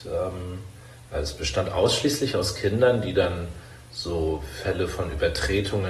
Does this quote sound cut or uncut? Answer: uncut